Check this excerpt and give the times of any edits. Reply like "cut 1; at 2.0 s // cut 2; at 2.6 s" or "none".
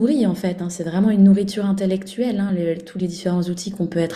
none